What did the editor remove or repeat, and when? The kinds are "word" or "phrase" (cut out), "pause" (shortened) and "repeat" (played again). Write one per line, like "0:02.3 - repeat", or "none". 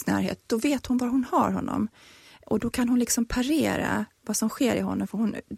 none